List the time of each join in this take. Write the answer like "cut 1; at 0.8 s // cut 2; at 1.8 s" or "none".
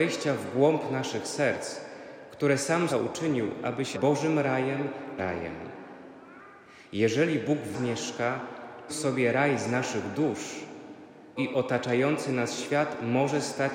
cut 1; at 2.9 s // cut 2; at 3.9 s // cut 3; at 5.2 s // cut 4; at 7.7 s // cut 5; at 8.9 s // cut 6; at 11.4 s